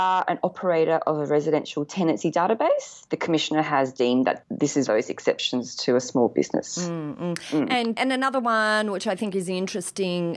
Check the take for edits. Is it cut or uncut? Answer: cut